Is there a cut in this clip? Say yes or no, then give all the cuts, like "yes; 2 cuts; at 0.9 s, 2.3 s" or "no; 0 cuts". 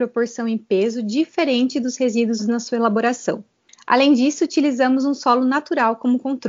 yes; 1 cut; at 2.4 s